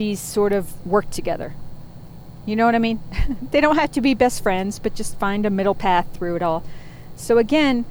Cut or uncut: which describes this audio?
uncut